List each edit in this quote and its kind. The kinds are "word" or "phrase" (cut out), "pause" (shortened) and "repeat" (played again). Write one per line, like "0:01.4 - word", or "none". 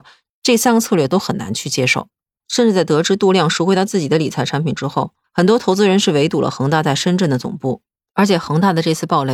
none

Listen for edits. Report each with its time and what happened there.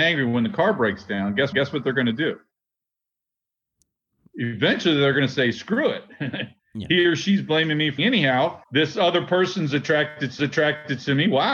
0:01.5 - repeat
0:08.0 - word
0:08.6 - pause
0:10.4 - repeat

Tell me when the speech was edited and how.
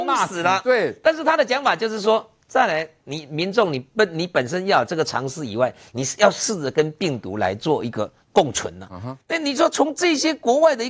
0:09.2 - pause

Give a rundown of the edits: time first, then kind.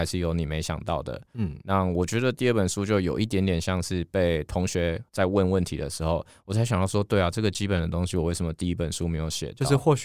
0:05.1 - pause

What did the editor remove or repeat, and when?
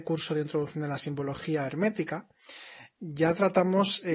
none

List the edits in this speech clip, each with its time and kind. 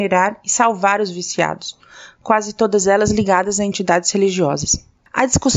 none

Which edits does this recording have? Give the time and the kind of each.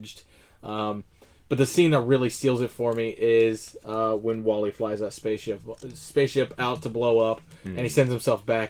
none

